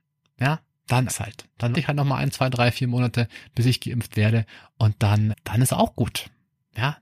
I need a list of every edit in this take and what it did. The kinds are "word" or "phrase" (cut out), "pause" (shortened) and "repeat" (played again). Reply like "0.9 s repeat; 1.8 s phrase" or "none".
1.1 s word; 1.7 s word; 5.3 s word

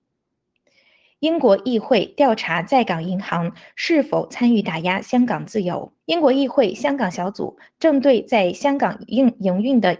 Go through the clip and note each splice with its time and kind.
6.0 s pause

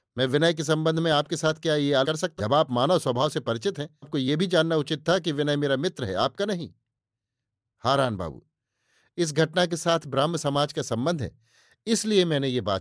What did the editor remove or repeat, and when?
2.0 s word; 2.4 s word; 4.0 s word

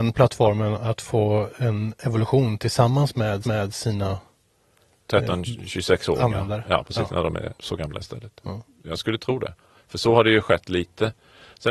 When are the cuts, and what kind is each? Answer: 3.4 s repeat; 7.6 s pause; 9.8 s pause

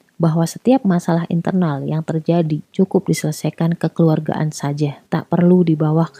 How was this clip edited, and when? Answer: 2.6 s pause; 5.1 s pause

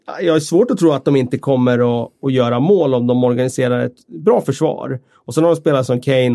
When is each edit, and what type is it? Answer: none

